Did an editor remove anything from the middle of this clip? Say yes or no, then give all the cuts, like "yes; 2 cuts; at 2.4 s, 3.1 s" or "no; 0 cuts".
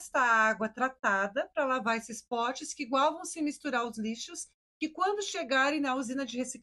no; 0 cuts